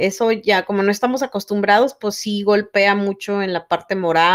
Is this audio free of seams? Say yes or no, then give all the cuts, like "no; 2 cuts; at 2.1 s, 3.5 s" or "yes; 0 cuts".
yes; 0 cuts